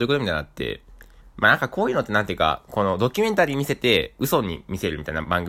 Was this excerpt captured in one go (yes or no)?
no